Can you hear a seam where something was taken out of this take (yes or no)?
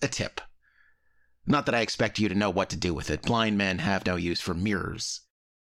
no